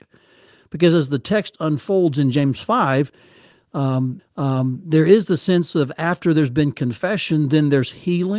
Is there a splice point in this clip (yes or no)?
yes